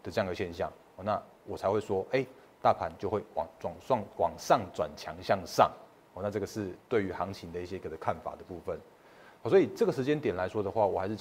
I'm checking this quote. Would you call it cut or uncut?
uncut